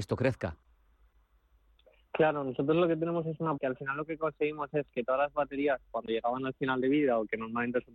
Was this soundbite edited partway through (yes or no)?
yes